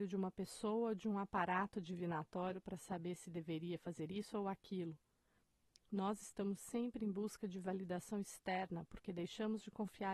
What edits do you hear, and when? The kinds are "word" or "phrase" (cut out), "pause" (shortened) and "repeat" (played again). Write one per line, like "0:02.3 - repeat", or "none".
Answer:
none